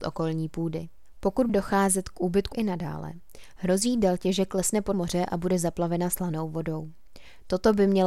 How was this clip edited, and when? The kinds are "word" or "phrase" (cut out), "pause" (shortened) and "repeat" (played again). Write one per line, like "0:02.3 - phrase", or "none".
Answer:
0:01.5 - word
0:02.5 - phrase
0:04.9 - word